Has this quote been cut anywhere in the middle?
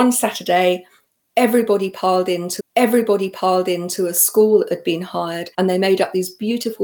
yes; 2 cuts; at 2.6 s, 5.5 s

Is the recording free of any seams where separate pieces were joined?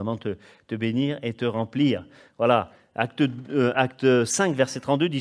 yes; 0 cuts

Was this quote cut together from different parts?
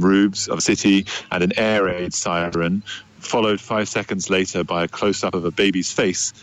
no; 0 cuts

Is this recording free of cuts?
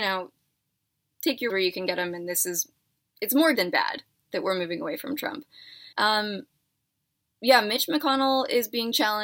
no; 5 cuts; at 1.5 s, 3.0 s, 3.5 s, 4.3 s, 5.9 s

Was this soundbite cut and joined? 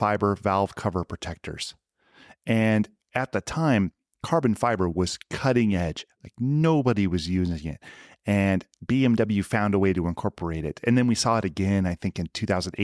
no; 0 cuts

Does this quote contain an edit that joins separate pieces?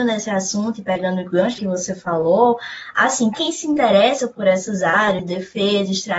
yes; 3 cuts; at 1.6 s, 3.3 s, 5.2 s

